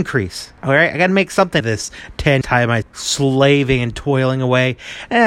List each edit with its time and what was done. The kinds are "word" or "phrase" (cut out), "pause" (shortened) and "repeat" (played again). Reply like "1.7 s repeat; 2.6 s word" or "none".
1.6 s word; 2.4 s word; 2.8 s word